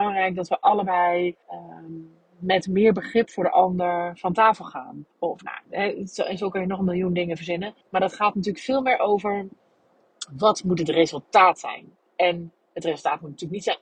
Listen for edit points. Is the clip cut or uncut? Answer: cut